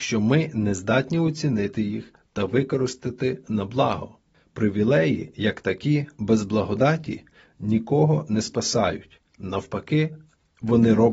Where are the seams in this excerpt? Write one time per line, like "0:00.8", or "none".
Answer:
none